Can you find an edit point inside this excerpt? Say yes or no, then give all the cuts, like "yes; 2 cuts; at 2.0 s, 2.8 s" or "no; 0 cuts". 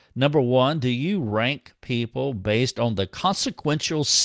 no; 0 cuts